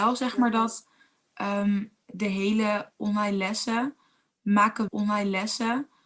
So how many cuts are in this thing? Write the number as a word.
one